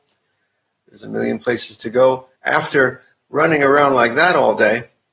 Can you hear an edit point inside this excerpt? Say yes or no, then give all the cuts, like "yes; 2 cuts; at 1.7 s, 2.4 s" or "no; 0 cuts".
yes; 1 cut; at 2.4 s